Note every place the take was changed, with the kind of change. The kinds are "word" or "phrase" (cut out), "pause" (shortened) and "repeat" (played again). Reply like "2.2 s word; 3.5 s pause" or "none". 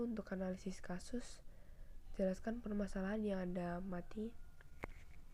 none